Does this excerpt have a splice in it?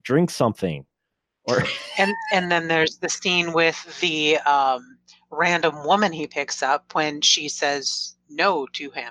no; 0 cuts

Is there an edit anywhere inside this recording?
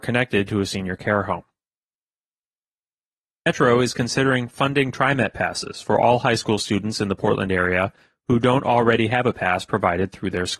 no; 0 cuts

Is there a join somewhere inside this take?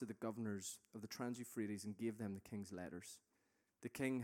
no; 0 cuts

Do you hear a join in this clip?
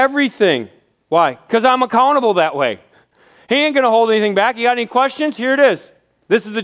no; 0 cuts

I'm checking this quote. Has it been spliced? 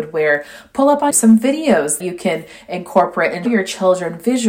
yes; 3 cuts; at 1.1 s, 2.0 s, 3.4 s

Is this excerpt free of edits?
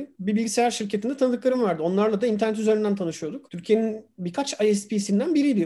yes; 0 cuts

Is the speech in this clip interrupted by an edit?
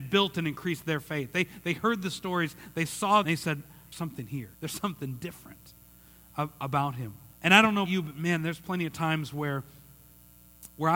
yes; 5 cuts; at 3.2 s, 3.9 s, 4.5 s, 7.3 s, 7.9 s

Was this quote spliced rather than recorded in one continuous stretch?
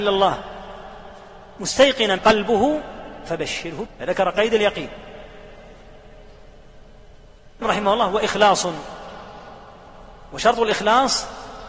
yes; 3 cuts; at 2.2 s, 3.9 s, 7.6 s

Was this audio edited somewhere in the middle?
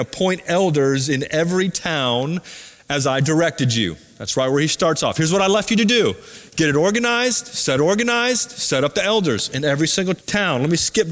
yes; 2 cuts; at 7.8 s, 10.2 s

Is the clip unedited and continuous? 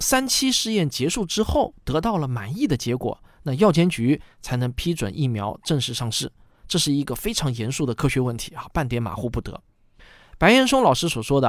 yes; 0 cuts

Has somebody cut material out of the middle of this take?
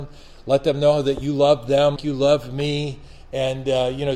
yes; 1 cut; at 2.0 s

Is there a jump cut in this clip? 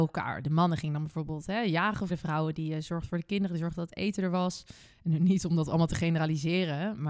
yes; 1 cut; at 2.1 s

